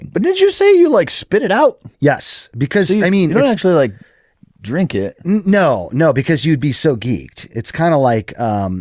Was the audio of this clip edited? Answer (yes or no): yes